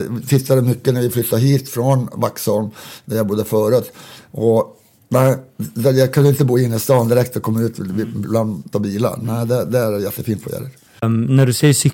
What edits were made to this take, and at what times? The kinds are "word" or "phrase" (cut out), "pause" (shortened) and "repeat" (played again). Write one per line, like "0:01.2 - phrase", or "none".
0:08.7 - phrase

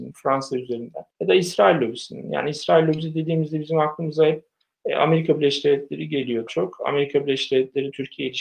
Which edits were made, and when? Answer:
0:01.1 - pause
0:06.5 - word

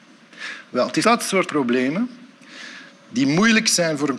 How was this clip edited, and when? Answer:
0:01.0 - word
0:01.5 - word
0:02.9 - pause

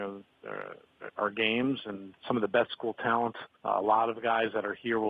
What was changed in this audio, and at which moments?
0:02.1 - word
0:02.7 - word
0:03.5 - pause

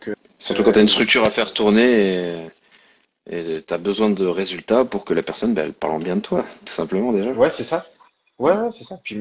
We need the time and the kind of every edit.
none

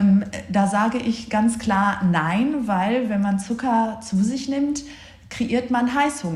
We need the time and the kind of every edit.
none

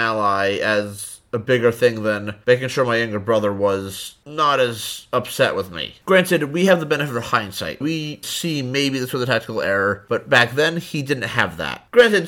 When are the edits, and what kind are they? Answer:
0:07.8 - word
0:08.2 - word

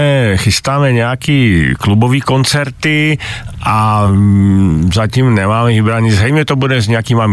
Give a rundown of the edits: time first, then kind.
none

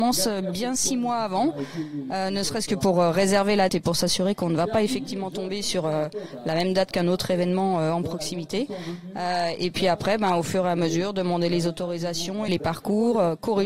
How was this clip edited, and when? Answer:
0:03.7 - word
0:12.5 - word

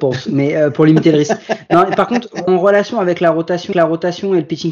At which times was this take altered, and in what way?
0:02.5 - word
0:03.7 - repeat

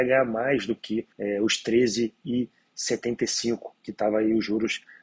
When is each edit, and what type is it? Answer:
0:01.1 - pause

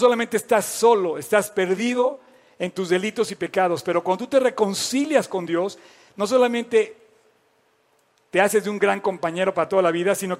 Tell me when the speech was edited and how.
none

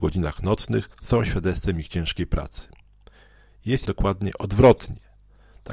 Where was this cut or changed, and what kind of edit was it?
0:00.9 - pause
0:03.8 - word

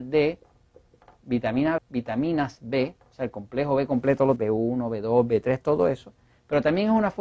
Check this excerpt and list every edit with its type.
0:01.8 - word
0:04.4 - word

